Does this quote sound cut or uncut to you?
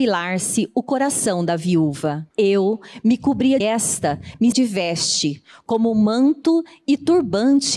cut